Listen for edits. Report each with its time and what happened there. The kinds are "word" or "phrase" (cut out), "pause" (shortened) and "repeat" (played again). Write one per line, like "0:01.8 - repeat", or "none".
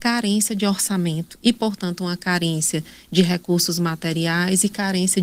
none